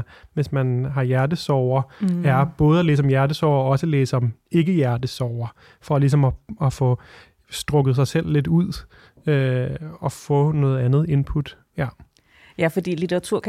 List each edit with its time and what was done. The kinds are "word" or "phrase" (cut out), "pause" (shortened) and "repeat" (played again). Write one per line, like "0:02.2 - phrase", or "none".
none